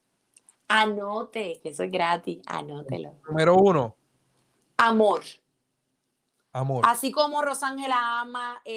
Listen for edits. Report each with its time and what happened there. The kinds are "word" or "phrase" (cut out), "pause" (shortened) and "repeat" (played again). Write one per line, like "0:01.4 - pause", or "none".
none